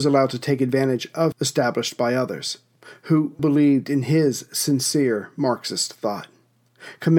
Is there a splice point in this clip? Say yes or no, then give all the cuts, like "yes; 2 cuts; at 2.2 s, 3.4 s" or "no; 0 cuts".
yes; 2 cuts; at 1.3 s, 3.4 s